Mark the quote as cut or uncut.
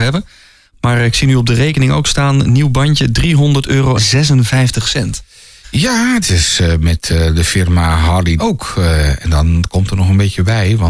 cut